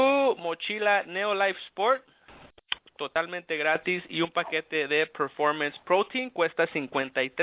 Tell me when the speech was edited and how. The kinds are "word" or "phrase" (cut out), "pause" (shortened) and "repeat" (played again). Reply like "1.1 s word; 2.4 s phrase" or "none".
none